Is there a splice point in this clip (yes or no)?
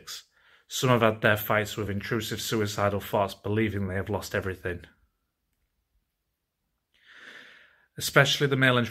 no